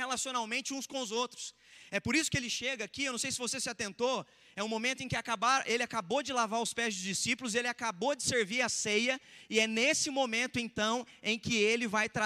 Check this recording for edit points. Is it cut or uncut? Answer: uncut